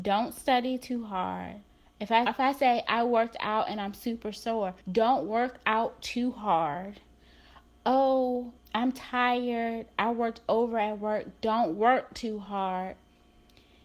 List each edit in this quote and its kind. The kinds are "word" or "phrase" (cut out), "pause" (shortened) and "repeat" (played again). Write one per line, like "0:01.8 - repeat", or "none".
0:01.7 - pause
0:02.3 - phrase
0:04.8 - pause
0:08.6 - word